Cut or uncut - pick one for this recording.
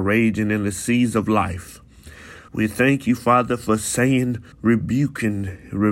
cut